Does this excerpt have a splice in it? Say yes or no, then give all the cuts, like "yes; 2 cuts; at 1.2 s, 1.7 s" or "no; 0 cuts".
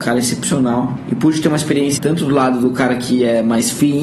yes; 1 cut; at 2.0 s